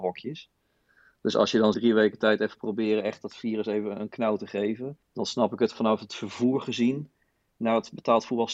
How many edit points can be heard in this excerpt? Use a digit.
2